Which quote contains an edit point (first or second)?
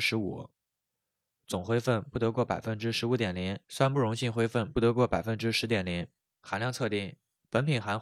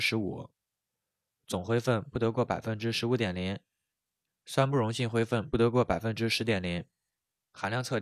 first